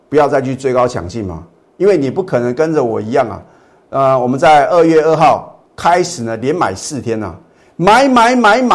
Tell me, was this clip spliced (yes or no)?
no